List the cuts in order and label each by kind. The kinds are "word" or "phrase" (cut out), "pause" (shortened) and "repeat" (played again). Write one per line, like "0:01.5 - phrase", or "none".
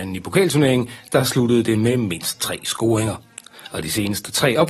none